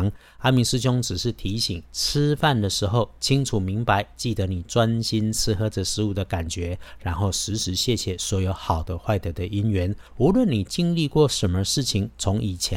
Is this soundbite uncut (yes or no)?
no